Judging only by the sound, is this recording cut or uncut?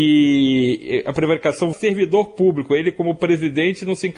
cut